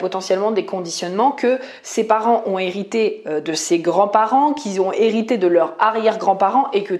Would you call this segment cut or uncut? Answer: uncut